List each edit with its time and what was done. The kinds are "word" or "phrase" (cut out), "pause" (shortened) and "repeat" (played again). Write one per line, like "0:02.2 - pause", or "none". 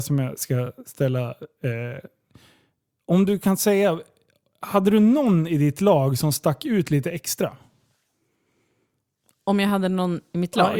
none